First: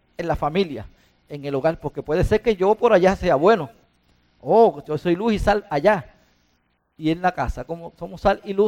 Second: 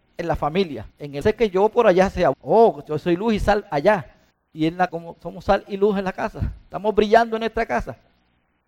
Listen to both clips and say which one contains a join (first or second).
second